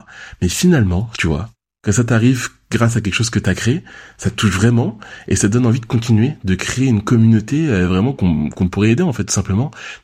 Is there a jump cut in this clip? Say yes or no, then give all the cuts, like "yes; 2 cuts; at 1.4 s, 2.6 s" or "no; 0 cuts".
no; 0 cuts